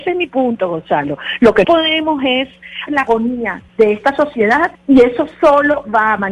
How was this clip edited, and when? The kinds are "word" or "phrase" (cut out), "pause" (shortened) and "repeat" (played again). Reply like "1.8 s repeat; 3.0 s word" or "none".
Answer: 1.6 s word; 2.9 s word; 3.7 s pause; 4.7 s pause